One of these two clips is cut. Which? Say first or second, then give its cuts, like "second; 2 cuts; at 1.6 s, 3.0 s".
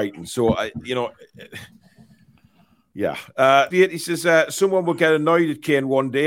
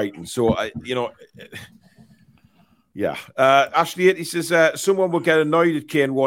first; 1 cut; at 3.7 s